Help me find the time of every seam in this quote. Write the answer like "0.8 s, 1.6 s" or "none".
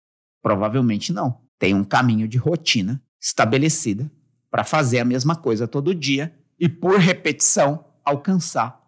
1.5 s, 3.1 s